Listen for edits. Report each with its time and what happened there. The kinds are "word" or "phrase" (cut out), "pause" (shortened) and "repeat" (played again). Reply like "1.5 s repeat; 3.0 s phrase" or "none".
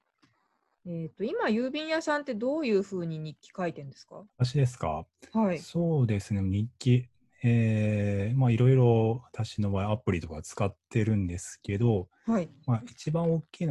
4.3 s pause